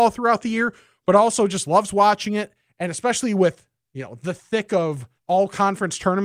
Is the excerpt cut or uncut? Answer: cut